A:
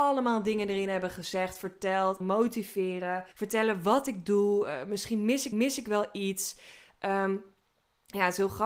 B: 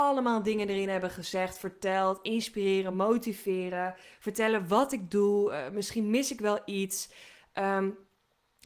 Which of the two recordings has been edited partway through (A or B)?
A